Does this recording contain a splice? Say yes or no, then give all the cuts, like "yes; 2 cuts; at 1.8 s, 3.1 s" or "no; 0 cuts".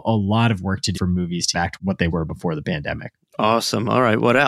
yes; 3 cuts; at 0.9 s, 1.5 s, 2.1 s